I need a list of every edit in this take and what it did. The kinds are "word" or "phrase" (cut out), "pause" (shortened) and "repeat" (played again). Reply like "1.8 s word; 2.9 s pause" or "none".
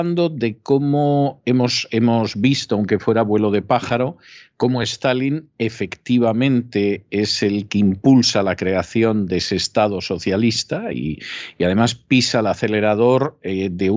none

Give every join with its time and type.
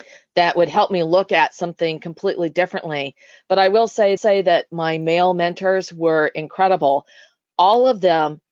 4.2 s repeat

